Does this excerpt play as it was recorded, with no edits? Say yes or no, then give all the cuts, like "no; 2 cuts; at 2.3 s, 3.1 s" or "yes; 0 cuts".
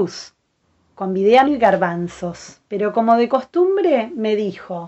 no; 2 cuts; at 1.4 s, 2.7 s